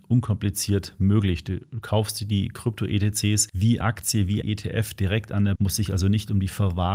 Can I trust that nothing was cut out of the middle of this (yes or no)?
no